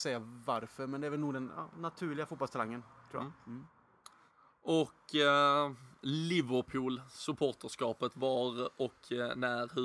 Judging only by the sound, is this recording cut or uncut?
uncut